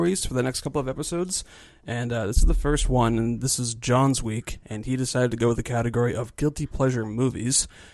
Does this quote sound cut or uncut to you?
uncut